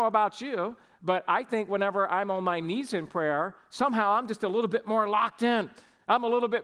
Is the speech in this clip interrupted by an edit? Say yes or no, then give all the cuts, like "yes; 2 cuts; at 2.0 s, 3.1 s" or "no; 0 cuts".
no; 0 cuts